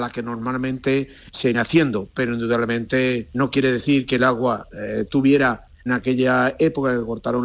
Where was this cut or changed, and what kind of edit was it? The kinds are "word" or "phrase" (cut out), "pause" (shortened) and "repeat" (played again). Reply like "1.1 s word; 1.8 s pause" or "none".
1.5 s word; 3.3 s word; 5.9 s word